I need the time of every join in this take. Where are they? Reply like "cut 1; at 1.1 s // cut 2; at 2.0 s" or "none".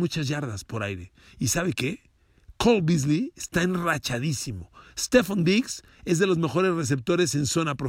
none